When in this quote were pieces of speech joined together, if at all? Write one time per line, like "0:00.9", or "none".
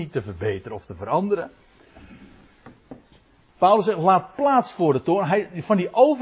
none